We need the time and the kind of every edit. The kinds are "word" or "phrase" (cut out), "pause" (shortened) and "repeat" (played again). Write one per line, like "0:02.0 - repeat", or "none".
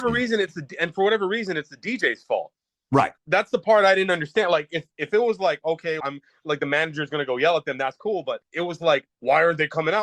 0:03.2 - pause
0:04.9 - word
0:06.0 - word
0:08.4 - pause